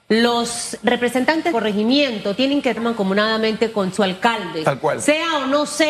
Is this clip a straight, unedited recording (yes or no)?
no